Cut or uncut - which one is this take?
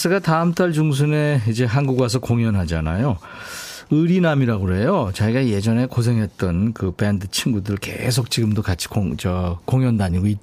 uncut